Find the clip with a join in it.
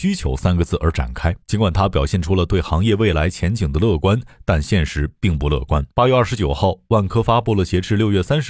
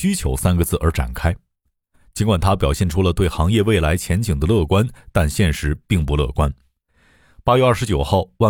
first; 2 cuts; at 1.4 s, 5.9 s

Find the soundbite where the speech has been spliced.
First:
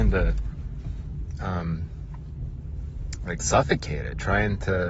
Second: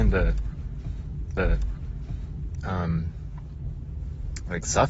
second; 1 cut; at 1.4 s

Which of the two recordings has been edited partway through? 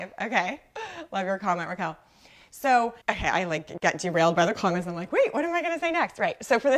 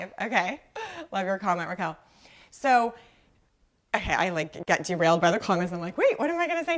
first; 1 cut; at 3.0 s

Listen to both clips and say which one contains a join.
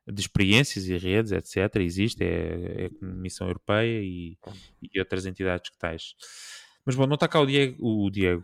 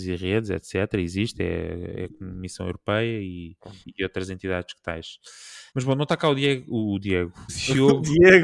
second; 3 cuts; at 3.8 s, 5.7 s, 7.5 s

